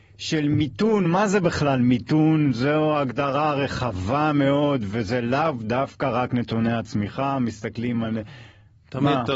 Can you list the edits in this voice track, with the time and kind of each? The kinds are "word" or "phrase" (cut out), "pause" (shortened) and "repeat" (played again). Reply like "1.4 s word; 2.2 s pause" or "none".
none